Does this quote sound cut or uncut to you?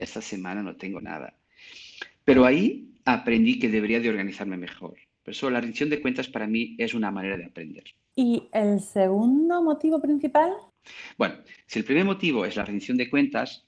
uncut